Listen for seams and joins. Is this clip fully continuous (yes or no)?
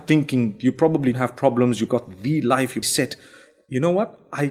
no